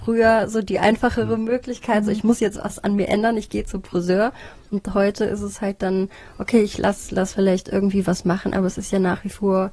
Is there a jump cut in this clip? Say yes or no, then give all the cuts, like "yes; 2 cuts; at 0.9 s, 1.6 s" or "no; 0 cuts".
no; 0 cuts